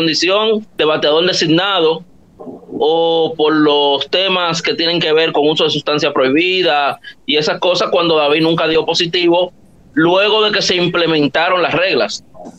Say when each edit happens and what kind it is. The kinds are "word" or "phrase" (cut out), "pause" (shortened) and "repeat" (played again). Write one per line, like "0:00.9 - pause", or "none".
none